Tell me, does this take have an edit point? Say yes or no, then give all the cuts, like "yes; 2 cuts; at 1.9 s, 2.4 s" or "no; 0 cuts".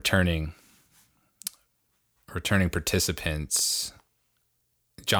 no; 0 cuts